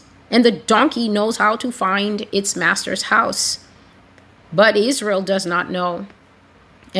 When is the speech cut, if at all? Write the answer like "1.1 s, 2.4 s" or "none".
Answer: none